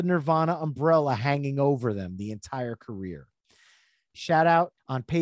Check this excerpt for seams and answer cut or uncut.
uncut